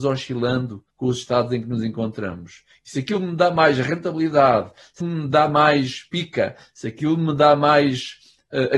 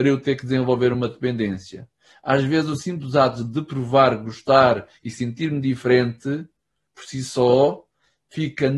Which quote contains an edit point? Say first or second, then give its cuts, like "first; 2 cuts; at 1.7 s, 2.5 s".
first; 2 cuts; at 0.9 s, 5.0 s